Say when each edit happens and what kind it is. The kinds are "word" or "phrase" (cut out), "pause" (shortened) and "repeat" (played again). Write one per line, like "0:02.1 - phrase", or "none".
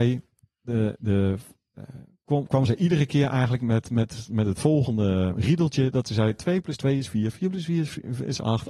none